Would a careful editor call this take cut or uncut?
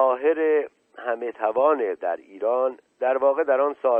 cut